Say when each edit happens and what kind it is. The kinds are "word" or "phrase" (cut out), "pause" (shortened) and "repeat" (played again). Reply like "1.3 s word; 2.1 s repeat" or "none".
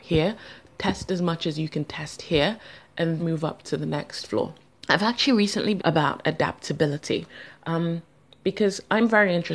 3.2 s word; 4.7 s pause; 5.8 s phrase